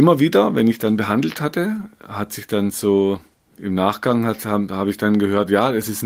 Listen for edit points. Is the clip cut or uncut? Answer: cut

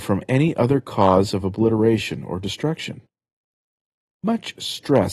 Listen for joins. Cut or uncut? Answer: uncut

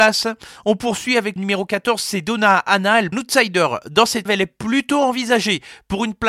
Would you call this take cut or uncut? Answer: cut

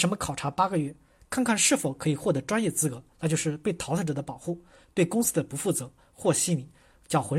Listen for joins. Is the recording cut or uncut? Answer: uncut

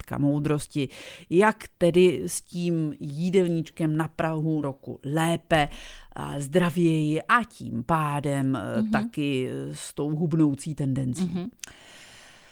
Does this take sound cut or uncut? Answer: cut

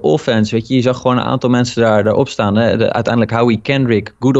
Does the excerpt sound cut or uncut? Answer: uncut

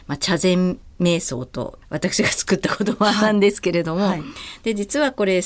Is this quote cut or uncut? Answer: uncut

